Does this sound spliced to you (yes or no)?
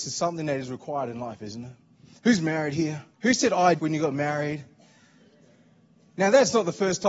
yes